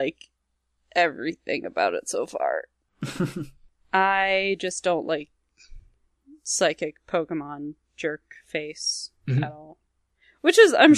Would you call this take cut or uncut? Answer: uncut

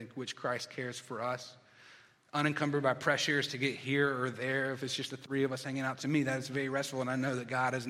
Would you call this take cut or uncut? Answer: uncut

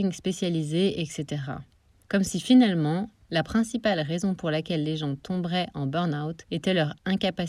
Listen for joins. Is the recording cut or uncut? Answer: uncut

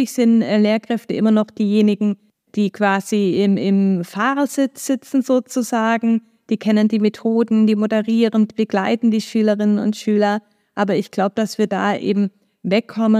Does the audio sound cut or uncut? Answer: uncut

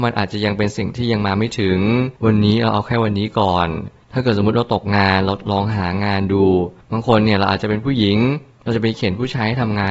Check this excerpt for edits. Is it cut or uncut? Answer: cut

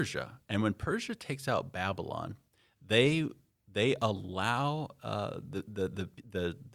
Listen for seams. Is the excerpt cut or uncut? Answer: uncut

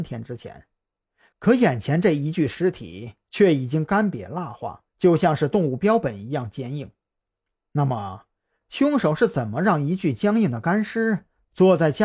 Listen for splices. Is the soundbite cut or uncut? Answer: cut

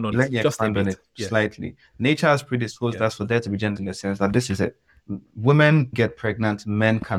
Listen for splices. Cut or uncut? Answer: cut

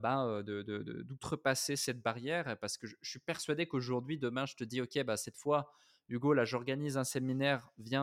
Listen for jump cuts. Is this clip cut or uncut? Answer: uncut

